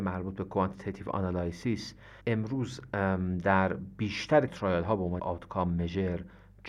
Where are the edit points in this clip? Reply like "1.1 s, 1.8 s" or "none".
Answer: 2.2 s, 4.5 s, 5.2 s